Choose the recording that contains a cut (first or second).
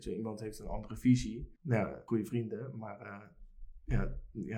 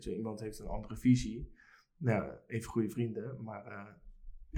first